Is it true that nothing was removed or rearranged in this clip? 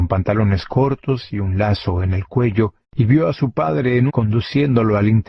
no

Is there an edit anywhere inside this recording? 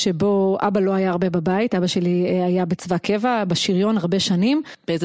no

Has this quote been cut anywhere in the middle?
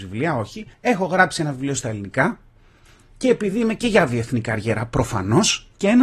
no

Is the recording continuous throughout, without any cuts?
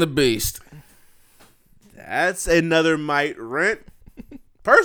yes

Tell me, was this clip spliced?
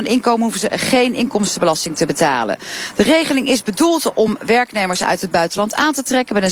no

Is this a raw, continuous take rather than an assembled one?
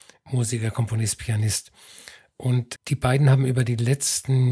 no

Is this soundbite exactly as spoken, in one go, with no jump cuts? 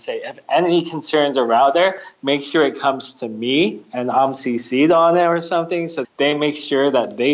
no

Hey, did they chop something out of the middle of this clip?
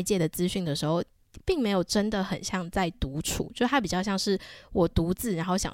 no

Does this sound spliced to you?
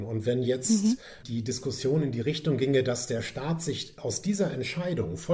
no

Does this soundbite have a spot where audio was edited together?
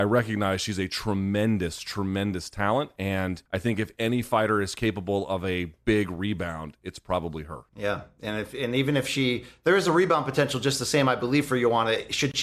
yes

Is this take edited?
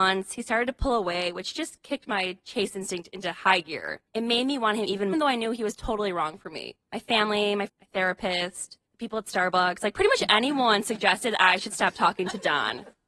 yes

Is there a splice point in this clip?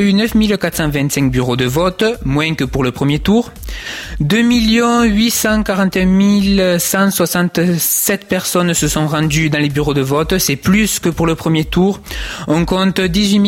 no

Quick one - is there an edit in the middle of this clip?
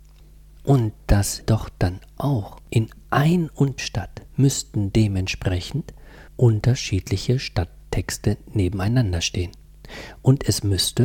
yes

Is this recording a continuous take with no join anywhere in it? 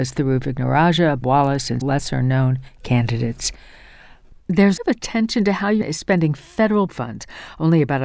no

